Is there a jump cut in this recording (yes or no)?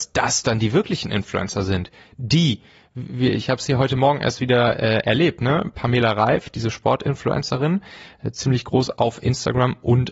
no